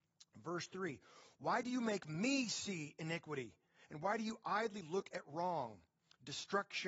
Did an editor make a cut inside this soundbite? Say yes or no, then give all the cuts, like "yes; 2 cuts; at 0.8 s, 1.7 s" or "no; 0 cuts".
no; 0 cuts